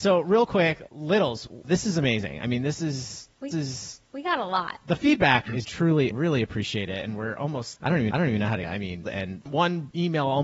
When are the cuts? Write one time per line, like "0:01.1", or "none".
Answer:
0:03.5
0:05.6
0:06.1
0:07.8
0:08.1
0:08.6
0:09.0